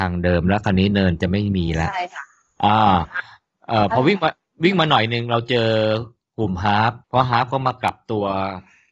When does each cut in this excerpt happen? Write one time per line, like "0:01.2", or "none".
0:07.0